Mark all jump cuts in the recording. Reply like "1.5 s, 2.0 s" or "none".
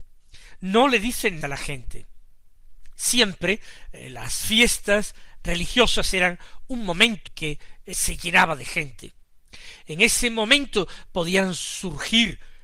1.4 s, 7.3 s, 7.9 s